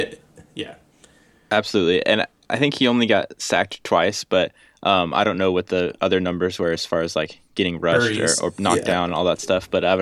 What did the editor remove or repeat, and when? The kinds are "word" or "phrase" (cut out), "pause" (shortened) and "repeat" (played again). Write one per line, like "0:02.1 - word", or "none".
none